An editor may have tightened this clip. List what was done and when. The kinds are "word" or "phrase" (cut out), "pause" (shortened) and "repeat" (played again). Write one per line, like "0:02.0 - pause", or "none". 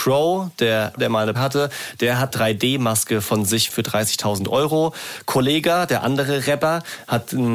0:01.0 - word
0:01.3 - word
0:02.3 - word
0:03.7 - word